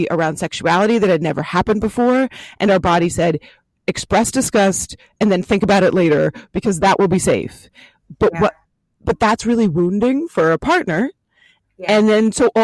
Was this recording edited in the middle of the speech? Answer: no; 0 cuts

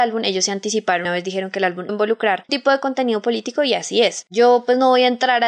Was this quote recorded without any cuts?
no; 3 cuts; at 1.0 s, 1.9 s, 2.5 s

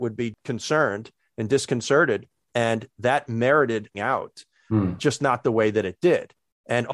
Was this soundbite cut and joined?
yes; 1 cut; at 3.9 s

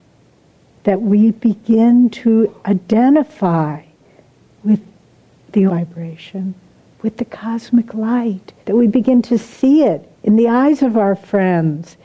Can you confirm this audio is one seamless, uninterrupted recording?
no; 3 cuts; at 5.7 s, 8.6 s, 10.1 s

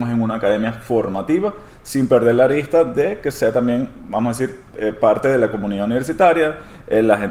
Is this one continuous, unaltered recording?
yes; 0 cuts

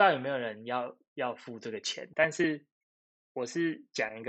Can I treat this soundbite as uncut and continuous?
no; 1 cut; at 2.1 s

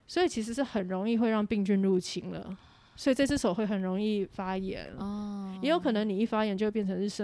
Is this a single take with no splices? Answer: yes; 0 cuts

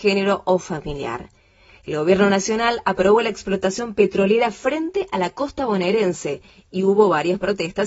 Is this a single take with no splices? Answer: yes; 0 cuts

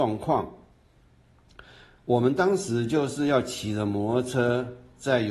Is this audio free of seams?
yes; 0 cuts

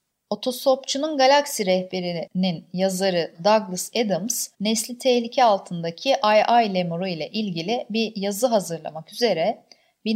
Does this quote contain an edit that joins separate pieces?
yes; 1 cut; at 4.5 s

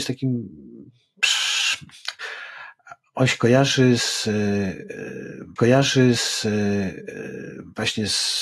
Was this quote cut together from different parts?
yes; 1 cut; at 5.6 s

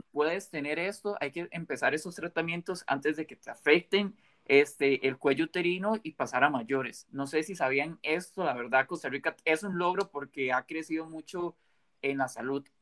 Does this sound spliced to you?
no; 0 cuts

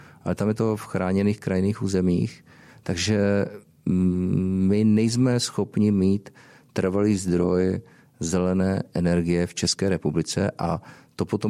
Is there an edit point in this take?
no; 0 cuts

